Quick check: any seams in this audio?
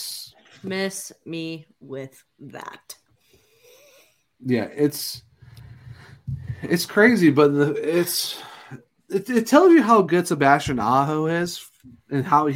yes; 1 cut; at 9.0 s

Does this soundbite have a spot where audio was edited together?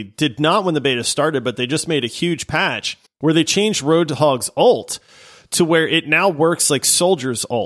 yes; 1 cut; at 3.1 s

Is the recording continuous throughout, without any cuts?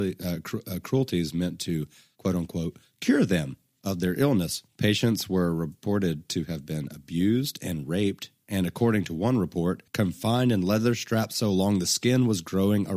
no; 2 cuts; at 4.7 s, 9.9 s

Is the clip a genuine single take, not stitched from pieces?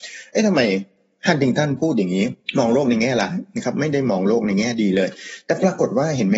yes; 0 cuts

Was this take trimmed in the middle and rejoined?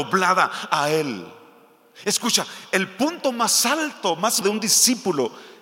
yes; 1 cut; at 4.4 s

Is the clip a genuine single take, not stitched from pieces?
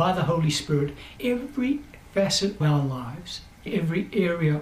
no; 3 cuts; at 1.2 s, 2.6 s, 3.7 s

